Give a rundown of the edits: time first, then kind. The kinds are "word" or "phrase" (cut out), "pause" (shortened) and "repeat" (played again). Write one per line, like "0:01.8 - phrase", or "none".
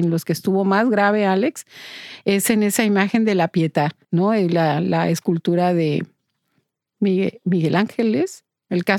0:04.0 - pause